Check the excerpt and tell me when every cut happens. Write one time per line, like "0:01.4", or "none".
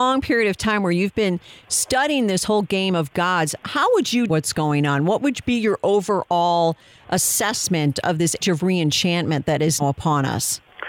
0:04.3
0:08.4
0:09.8